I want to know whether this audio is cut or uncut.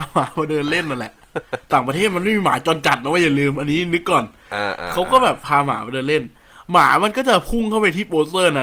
uncut